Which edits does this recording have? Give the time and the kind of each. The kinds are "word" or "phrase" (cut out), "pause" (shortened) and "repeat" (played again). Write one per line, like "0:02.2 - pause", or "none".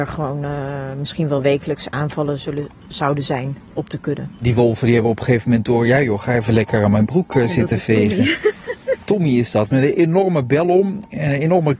none